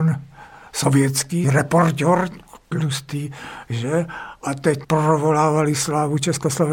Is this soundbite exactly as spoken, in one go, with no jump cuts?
no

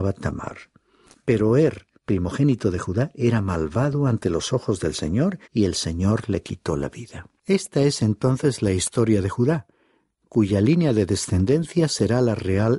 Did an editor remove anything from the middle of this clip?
yes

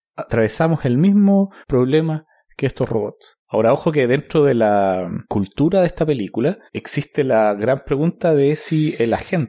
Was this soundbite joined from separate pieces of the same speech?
yes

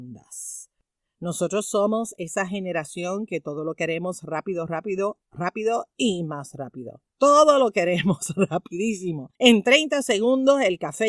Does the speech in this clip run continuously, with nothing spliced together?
no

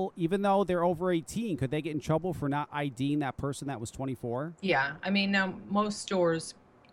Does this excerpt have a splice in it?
yes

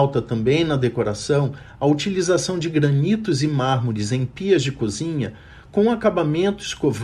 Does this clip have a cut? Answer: no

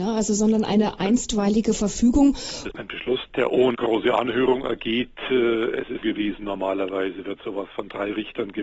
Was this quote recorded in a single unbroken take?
no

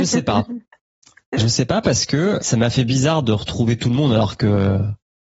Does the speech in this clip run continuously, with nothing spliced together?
no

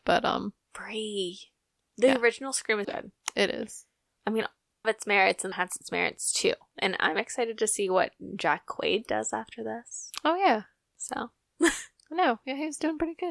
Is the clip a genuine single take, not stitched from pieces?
no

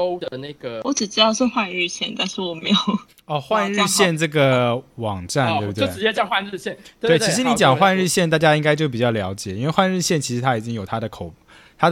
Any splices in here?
yes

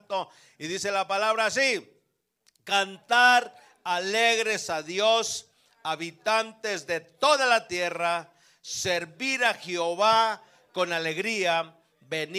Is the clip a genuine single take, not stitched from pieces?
yes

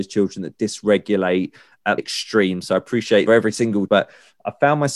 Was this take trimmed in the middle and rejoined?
yes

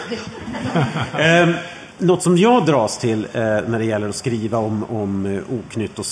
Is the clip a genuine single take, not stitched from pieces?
no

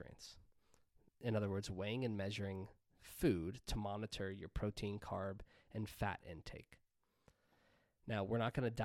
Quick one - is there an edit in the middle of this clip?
no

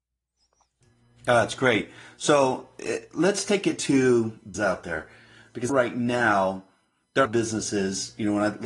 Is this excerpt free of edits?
no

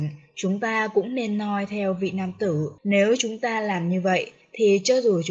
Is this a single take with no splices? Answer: no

